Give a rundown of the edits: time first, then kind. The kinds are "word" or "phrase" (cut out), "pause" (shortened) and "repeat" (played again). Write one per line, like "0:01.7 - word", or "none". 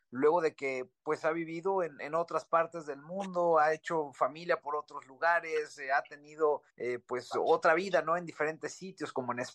0:06.7 - pause